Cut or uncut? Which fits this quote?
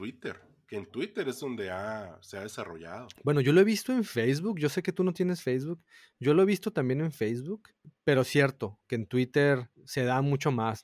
cut